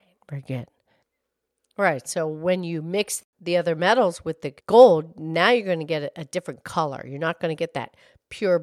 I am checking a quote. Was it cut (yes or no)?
yes